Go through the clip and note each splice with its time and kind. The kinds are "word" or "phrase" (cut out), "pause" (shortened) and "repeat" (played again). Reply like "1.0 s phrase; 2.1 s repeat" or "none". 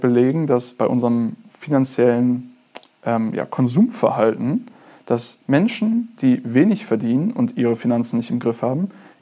none